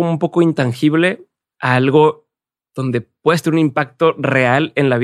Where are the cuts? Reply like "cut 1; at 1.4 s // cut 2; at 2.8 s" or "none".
none